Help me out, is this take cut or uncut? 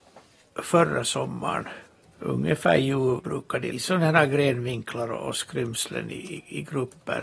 cut